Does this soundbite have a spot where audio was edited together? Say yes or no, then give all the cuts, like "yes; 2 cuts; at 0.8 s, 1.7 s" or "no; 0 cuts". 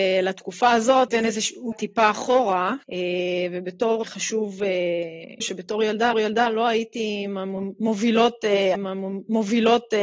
yes; 7 cuts; at 1.1 s, 1.7 s, 2.8 s, 4.0 s, 5.4 s, 6.1 s, 8.7 s